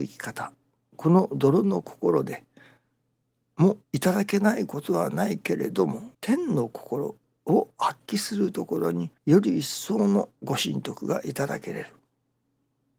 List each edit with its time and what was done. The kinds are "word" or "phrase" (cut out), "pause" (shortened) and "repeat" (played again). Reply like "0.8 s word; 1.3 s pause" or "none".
3.8 s pause; 6.1 s pause; 9.2 s pause; 10.4 s pause